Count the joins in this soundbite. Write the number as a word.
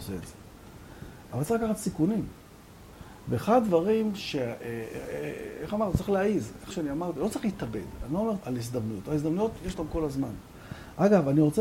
three